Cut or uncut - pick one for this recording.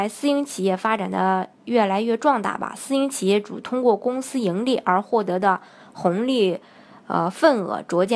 uncut